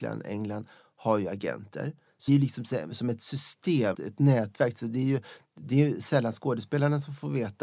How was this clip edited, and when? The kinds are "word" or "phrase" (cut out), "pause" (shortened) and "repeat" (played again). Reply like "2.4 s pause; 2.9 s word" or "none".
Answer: 2.3 s word; 3.9 s word